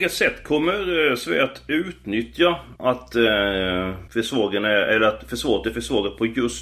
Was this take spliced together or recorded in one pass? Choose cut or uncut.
cut